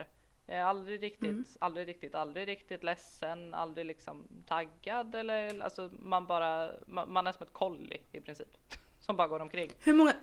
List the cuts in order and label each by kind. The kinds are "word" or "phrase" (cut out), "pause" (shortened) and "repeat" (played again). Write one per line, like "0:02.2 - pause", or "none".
0:02.1 - word